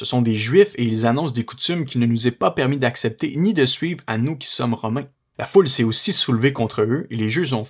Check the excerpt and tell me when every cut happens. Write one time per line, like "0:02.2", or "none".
0:05.2

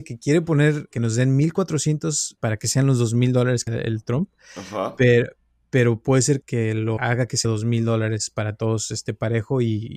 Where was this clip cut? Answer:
0:00.9
0:02.4
0:03.7
0:06.4
0:07.0
0:07.4

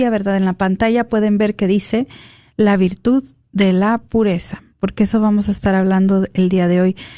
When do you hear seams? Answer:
none

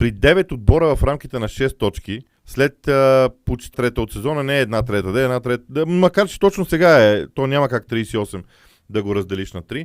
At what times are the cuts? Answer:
0:02.4
0:03.7

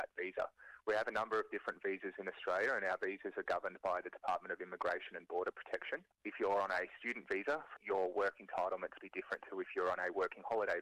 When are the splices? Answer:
0:06.1
0:07.8
0:09.0

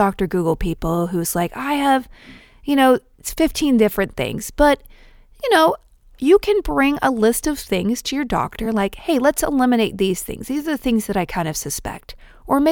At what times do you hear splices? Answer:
none

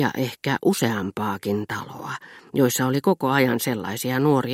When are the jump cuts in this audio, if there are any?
none

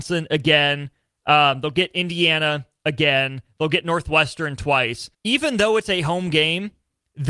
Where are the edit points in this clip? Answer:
0:05.1

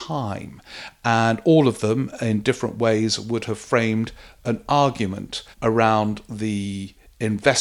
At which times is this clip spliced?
0:05.5

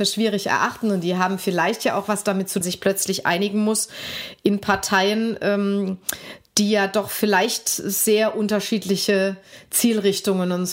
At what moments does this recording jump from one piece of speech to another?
0:02.6

